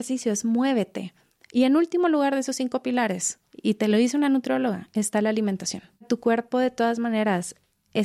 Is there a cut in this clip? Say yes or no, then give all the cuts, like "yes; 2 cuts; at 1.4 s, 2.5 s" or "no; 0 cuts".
no; 0 cuts